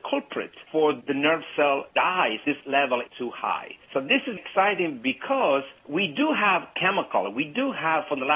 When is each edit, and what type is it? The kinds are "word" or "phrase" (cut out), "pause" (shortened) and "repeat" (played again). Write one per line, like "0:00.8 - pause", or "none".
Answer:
0:02.4 - word
0:03.1 - phrase
0:04.4 - word